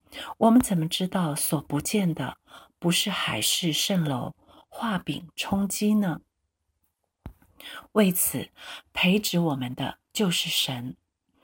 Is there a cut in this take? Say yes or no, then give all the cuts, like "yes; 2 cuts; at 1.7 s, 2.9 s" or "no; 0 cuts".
no; 0 cuts